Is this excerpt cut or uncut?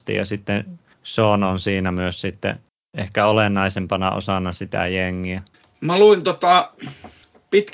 cut